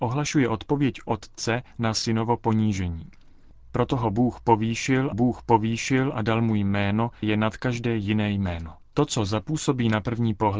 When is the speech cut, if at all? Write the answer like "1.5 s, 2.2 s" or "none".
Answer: 5.1 s, 7.2 s, 8.8 s